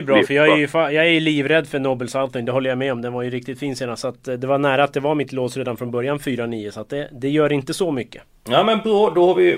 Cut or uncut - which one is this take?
uncut